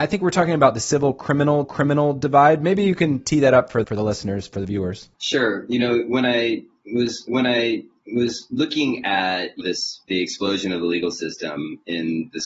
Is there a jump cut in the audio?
yes; 5 cuts; at 1.6 s, 3.8 s, 5.1 s, 7.3 s, 9.6 s

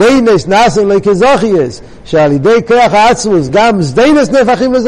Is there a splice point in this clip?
no; 0 cuts

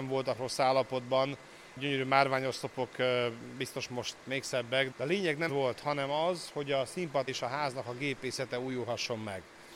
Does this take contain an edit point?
yes; 3 cuts; at 4.9 s, 5.5 s, 7.3 s

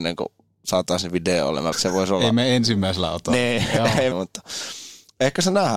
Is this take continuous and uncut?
no; 2 cuts; at 1.7 s, 4.1 s

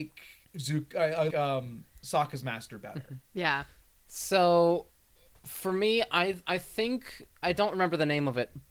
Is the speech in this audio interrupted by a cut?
yes; 2 cuts; at 1.3 s, 7.4 s

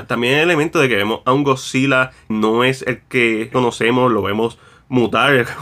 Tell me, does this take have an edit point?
yes; 2 cuts; at 2.3 s, 3.5 s

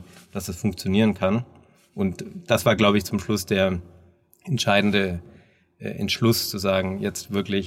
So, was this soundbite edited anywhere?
no; 0 cuts

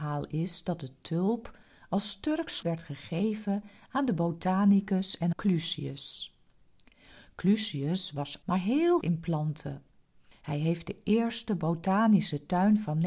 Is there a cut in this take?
yes; 4 cuts; at 2.6 s, 5.3 s, 8.4 s, 9.0 s

